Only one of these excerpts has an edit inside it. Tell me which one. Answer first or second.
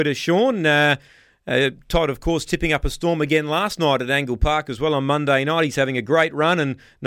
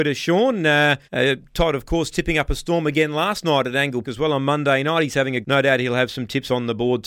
second